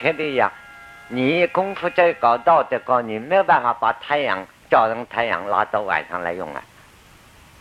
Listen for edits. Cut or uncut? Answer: uncut